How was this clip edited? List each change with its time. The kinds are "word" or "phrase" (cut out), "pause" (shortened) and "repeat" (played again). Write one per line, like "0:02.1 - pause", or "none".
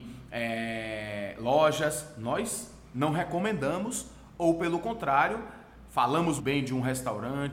0:06.4 - word